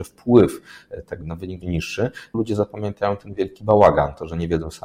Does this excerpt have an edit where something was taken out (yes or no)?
yes